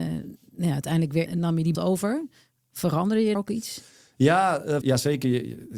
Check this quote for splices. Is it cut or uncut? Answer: cut